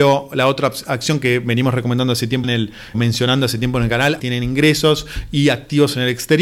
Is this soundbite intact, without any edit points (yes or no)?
no